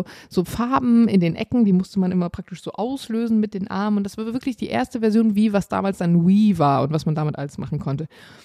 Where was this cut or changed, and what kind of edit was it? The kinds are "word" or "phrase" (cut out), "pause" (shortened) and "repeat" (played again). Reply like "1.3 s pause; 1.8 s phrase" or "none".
none